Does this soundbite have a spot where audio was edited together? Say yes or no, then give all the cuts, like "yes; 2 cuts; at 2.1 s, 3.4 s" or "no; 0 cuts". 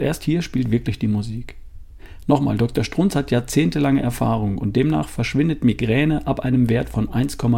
no; 0 cuts